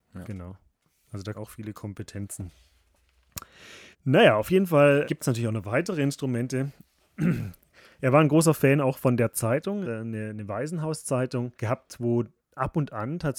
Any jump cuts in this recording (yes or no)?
yes